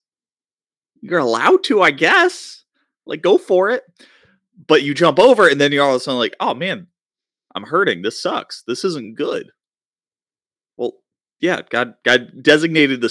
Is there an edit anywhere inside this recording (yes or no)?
no